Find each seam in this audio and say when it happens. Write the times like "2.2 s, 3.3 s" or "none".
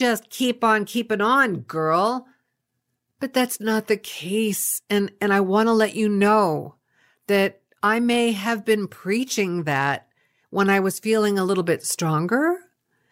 none